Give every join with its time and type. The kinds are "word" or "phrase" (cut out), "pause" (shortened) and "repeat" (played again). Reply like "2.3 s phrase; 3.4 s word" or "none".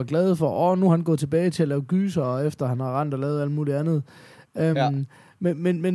4.7 s word